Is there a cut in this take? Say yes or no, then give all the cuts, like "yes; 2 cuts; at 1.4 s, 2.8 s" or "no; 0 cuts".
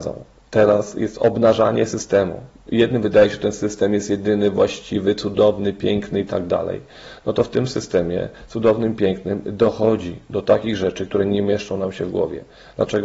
no; 0 cuts